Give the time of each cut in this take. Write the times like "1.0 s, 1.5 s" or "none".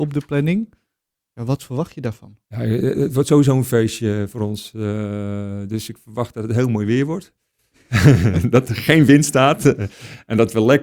2.4 s